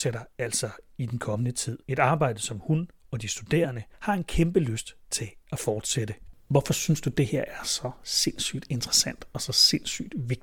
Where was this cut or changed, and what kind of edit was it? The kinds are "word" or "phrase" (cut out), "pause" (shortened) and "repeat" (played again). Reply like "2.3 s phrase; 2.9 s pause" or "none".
1.8 s pause; 3.0 s pause; 3.9 s pause